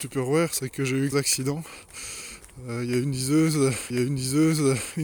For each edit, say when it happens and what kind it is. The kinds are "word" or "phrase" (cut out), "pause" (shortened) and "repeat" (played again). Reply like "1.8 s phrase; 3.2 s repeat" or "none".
1.1 s word; 3.9 s repeat